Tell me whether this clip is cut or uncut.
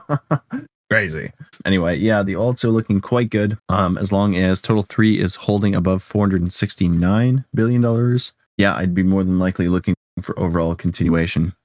cut